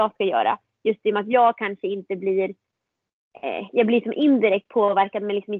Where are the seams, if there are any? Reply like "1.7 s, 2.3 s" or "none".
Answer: none